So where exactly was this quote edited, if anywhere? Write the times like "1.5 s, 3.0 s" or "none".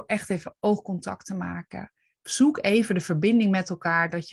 none